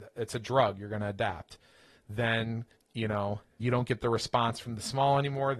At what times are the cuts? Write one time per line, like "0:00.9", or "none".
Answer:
0:02.7
0:03.6